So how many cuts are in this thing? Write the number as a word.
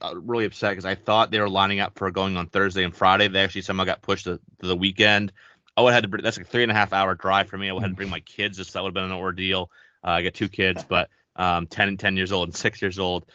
one